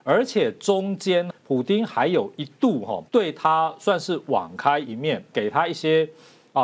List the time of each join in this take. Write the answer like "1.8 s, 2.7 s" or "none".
1.3 s, 3.1 s, 5.3 s